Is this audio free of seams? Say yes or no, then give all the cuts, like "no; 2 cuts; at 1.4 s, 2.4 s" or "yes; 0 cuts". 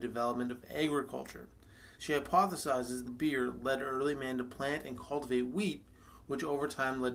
no; 2 cuts; at 1.9 s, 3.0 s